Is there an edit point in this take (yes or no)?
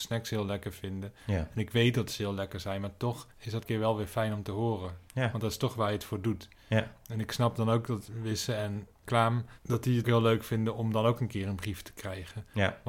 yes